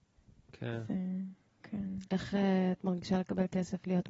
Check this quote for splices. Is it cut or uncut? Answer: uncut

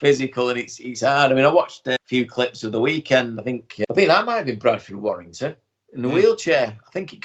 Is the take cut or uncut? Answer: uncut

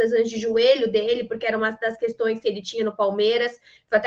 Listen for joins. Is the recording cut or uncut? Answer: uncut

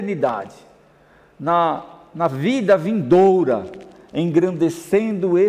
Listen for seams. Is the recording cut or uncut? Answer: uncut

